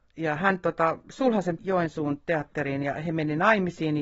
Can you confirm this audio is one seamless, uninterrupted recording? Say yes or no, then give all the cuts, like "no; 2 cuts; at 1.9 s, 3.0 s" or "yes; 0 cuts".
no; 1 cut; at 1.6 s